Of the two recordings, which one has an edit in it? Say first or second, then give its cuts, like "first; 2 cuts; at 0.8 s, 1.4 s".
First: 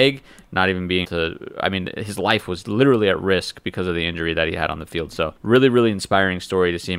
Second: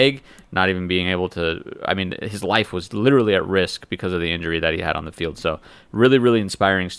first; 2 cuts; at 1.0 s, 5.4 s